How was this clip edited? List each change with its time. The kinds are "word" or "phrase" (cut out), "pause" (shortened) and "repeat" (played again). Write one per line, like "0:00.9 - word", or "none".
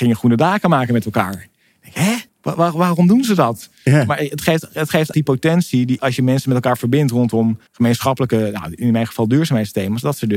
0:02.3 - pause
0:05.1 - phrase
0:06.0 - word
0:07.7 - pause